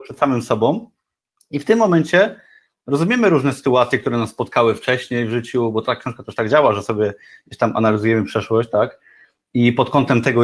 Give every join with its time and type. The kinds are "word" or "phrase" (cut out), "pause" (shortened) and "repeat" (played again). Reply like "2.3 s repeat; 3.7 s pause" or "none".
none

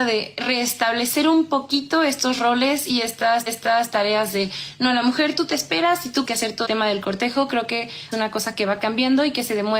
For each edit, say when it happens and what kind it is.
3.5 s repeat; 6.2 s phrase; 6.6 s word; 8.1 s phrase

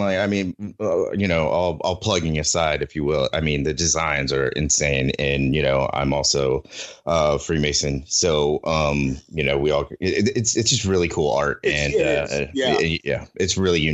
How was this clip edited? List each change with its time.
none

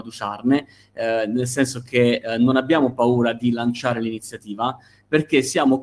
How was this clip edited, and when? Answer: none

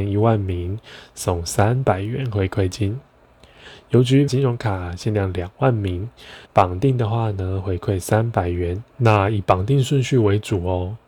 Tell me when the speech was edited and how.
4.3 s word; 6.4 s pause; 8.9 s pause

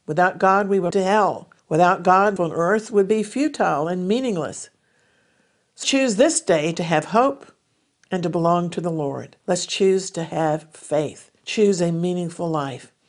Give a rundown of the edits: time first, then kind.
0.9 s phrase; 1.6 s pause; 2.4 s word; 5.8 s word; 9.4 s pause; 11.4 s pause

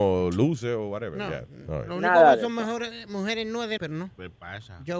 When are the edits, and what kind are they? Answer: 3.8 s word

